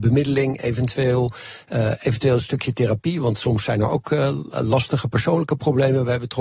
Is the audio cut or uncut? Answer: uncut